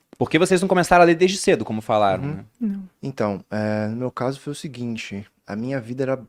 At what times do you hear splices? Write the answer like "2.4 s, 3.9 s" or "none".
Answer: 2.9 s